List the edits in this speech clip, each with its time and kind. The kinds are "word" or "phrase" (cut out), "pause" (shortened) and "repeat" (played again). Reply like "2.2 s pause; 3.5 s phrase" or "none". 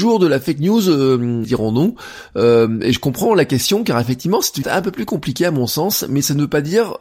1.4 s word; 4.6 s word